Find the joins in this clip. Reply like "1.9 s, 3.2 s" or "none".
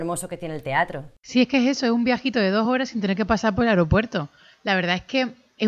none